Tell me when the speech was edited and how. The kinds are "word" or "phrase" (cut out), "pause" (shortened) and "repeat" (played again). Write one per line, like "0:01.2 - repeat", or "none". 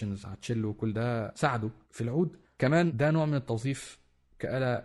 0:02.4 - pause